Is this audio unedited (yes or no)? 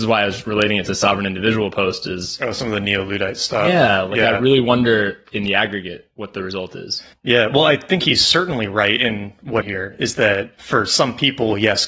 no